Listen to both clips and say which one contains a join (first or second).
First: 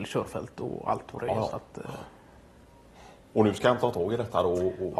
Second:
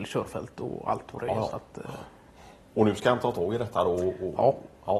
second